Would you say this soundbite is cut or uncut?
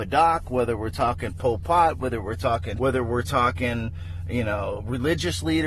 cut